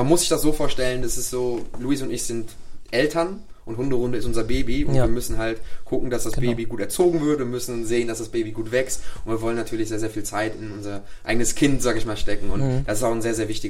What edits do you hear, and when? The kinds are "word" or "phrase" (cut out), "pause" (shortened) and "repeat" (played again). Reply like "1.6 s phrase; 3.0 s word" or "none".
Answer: none